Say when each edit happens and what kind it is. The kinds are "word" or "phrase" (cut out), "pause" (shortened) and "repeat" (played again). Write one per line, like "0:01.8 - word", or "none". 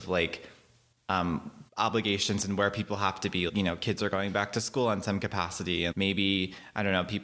0:01.7 - pause
0:03.5 - word
0:05.9 - word